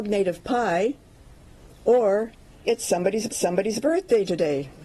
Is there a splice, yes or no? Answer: yes